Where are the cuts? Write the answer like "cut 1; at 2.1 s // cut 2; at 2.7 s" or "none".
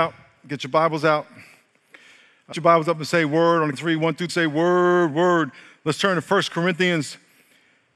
cut 1; at 2.5 s // cut 2; at 3.7 s // cut 3; at 4.3 s